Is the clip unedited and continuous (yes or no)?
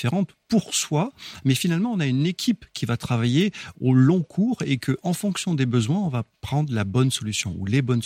no